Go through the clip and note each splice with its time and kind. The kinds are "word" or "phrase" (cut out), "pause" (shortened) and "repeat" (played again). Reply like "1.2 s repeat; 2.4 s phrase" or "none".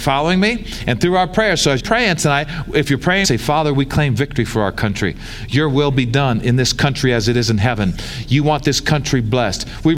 1.8 s word; 3.2 s phrase